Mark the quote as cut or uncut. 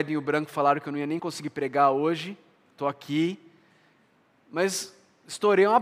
uncut